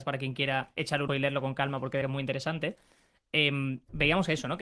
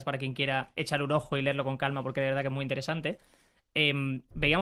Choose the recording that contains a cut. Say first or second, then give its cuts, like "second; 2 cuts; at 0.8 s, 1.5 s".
first; 2 cuts; at 1.1 s, 2.0 s